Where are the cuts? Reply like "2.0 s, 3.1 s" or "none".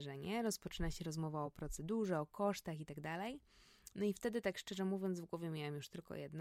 none